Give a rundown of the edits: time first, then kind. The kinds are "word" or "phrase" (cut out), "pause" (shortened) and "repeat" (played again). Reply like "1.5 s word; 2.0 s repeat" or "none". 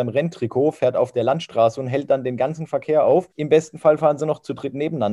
3.3 s pause